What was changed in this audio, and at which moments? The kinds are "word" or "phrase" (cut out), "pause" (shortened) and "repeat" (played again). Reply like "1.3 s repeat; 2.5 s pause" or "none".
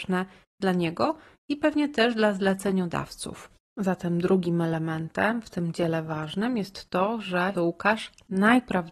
7.5 s word